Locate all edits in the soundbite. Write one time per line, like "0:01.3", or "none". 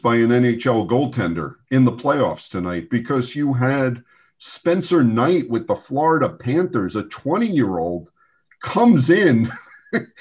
none